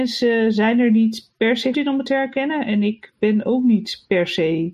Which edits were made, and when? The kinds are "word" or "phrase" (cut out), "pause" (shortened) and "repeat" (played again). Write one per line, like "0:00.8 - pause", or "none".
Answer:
0:01.7 - word

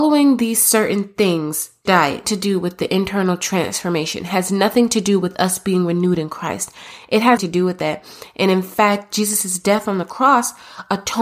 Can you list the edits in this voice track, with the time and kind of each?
0:01.9 - word
0:02.2 - phrase
0:07.4 - word

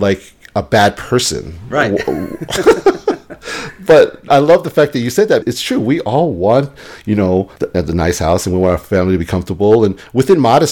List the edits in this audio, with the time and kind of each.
0:04.3 - word
0:05.4 - word
0:07.6 - pause

